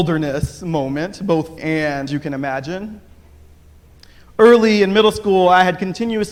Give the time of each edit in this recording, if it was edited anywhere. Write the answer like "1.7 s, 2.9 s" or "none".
1.6 s, 2.1 s